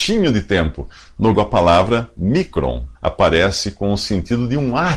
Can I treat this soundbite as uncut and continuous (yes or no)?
no